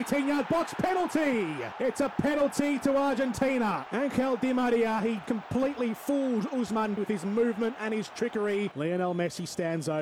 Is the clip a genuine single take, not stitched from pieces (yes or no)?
no